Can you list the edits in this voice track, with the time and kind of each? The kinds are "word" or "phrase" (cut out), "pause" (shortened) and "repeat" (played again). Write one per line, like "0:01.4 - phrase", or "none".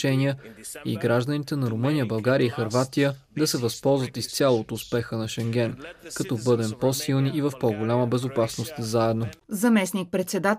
none